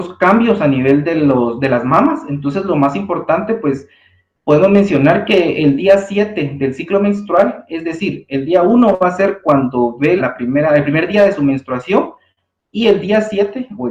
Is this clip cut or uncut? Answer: cut